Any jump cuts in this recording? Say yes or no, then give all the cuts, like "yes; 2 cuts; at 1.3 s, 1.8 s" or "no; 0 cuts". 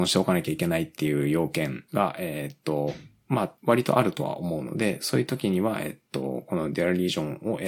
yes; 2 cuts; at 1.9 s, 3.6 s